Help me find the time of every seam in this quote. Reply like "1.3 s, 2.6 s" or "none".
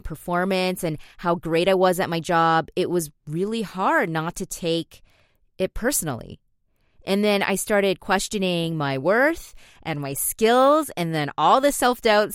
none